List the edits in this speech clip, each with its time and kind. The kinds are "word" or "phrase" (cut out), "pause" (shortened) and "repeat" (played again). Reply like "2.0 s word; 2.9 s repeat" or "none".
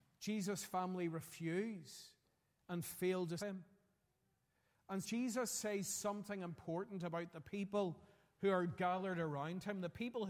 3.4 s phrase; 5.0 s word